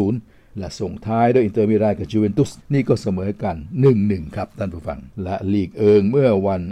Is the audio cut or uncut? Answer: cut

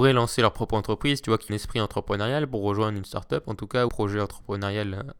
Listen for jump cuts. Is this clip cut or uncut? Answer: cut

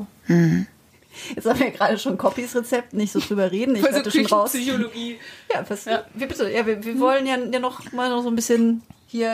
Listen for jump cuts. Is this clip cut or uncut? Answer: uncut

